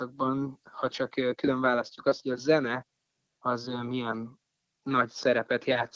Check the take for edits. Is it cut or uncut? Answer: uncut